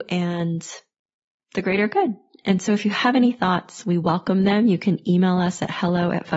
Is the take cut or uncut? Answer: uncut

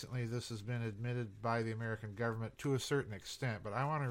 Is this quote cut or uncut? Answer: uncut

